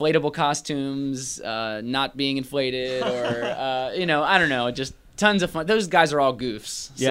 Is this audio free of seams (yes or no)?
yes